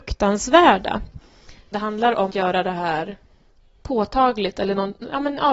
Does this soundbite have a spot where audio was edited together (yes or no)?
yes